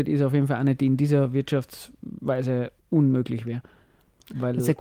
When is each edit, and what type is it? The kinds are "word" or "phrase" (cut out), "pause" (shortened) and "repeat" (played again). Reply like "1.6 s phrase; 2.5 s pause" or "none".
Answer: 2.8 s pause